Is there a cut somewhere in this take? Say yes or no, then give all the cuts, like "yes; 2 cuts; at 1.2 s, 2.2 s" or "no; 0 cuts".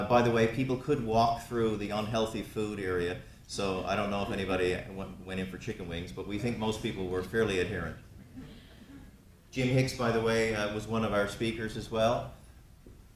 no; 0 cuts